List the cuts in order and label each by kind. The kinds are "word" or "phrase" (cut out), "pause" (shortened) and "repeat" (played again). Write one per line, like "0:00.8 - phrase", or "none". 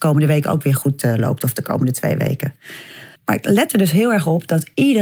0:03.2 - pause